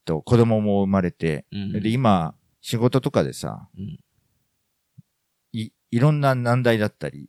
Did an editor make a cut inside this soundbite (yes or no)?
yes